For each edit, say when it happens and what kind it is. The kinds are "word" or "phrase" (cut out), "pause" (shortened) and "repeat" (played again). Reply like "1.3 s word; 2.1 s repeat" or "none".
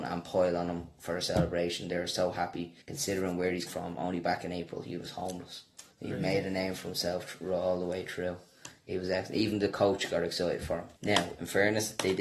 2.8 s pause; 3.7 s word; 5.9 s pause; 11.0 s pause